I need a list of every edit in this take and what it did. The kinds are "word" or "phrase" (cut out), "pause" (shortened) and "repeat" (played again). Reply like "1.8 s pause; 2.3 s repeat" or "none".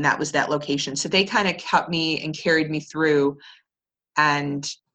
none